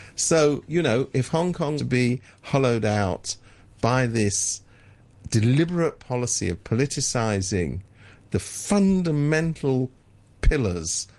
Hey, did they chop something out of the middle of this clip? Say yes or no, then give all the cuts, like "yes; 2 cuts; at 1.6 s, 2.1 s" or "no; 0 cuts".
yes; 1 cut; at 1.8 s